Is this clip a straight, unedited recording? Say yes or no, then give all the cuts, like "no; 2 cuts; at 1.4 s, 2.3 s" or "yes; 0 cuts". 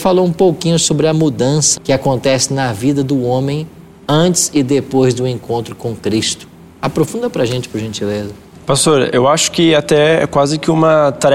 no; 1 cut; at 1.8 s